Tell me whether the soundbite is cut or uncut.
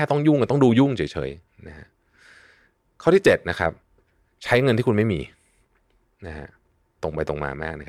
uncut